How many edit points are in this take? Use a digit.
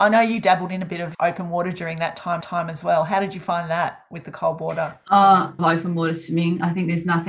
3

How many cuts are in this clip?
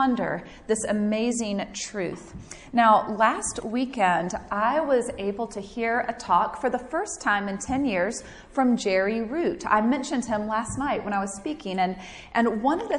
0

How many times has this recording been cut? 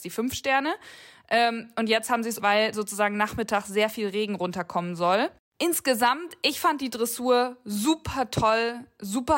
1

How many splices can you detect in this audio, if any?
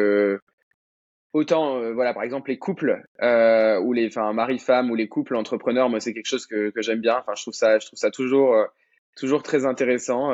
0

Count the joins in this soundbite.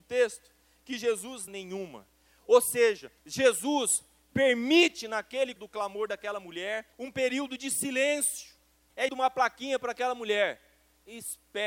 5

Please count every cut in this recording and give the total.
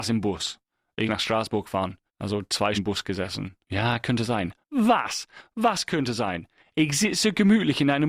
5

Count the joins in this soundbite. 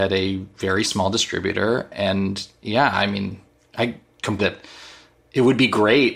1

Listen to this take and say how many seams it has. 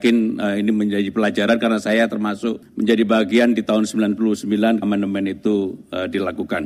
1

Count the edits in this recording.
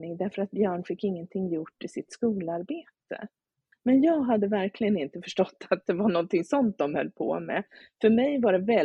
0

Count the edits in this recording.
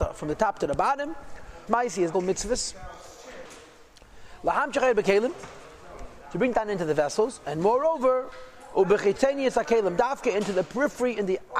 3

